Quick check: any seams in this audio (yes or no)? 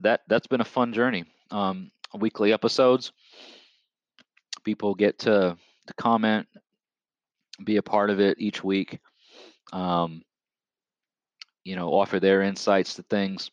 no